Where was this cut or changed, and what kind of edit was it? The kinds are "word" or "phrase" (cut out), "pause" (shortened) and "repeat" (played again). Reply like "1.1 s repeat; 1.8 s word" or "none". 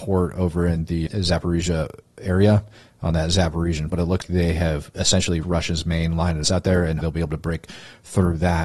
1.1 s word; 3.9 s word; 4.2 s word; 5.4 s word; 6.4 s word; 7.0 s word